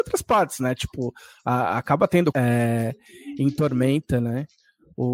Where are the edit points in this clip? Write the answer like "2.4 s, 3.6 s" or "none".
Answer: 2.3 s